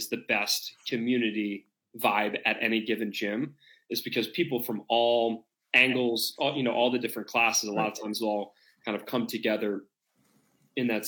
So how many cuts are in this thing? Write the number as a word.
zero